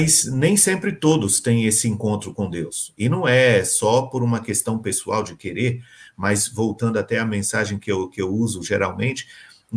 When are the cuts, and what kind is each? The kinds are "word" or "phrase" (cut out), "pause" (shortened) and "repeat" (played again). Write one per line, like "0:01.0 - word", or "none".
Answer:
none